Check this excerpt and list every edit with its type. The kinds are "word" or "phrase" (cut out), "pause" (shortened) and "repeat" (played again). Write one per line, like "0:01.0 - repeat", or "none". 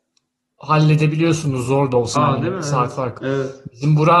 0:02.2 - word
0:03.2 - word